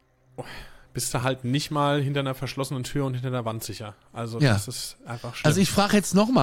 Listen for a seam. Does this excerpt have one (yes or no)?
no